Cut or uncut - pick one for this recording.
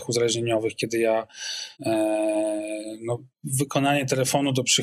cut